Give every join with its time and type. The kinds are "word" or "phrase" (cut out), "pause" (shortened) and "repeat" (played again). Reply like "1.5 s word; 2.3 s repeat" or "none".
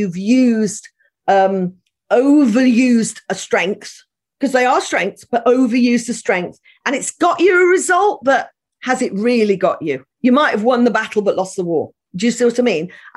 10.1 s pause